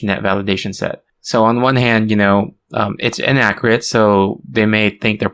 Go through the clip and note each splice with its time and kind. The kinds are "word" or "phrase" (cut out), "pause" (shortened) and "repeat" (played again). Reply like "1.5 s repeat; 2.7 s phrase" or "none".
none